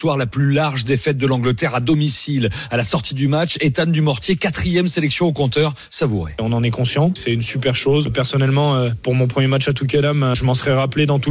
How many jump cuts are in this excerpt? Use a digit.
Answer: 0